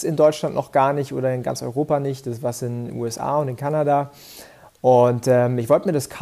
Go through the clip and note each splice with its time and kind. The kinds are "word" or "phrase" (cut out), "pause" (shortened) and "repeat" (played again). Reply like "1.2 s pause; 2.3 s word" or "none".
none